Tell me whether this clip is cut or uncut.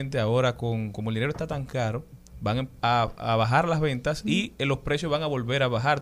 uncut